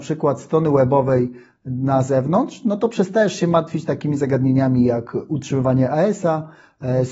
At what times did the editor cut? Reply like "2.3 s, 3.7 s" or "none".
none